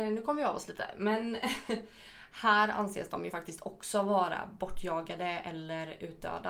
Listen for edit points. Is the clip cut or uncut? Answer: uncut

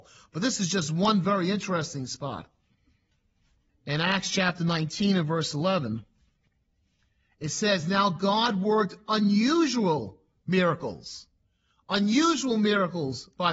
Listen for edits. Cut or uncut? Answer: uncut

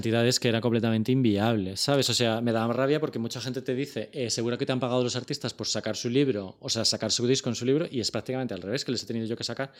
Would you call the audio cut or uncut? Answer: uncut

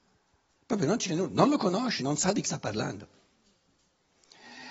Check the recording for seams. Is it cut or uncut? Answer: cut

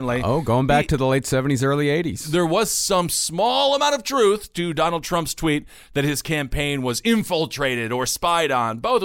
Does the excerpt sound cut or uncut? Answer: uncut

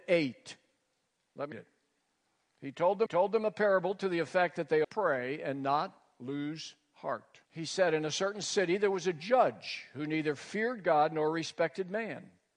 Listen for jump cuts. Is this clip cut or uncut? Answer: cut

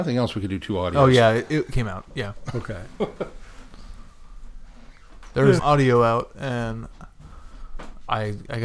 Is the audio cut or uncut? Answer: cut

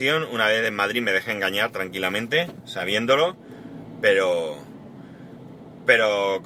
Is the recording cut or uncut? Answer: uncut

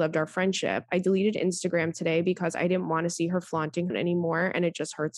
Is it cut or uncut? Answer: cut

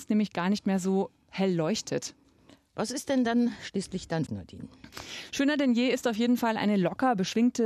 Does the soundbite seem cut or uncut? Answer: cut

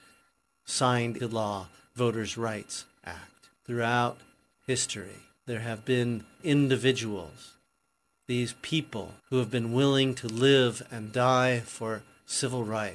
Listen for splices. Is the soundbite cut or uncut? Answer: cut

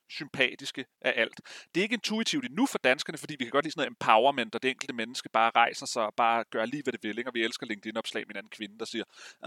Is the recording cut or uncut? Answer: uncut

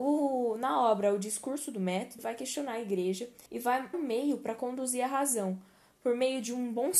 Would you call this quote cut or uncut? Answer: cut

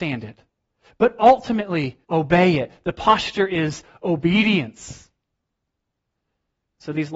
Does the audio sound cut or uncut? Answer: cut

